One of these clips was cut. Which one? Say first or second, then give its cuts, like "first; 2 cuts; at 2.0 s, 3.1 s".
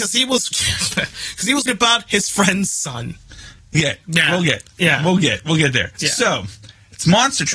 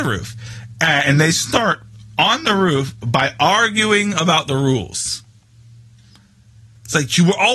first; 3 cuts; at 1.7 s, 3.7 s, 5.9 s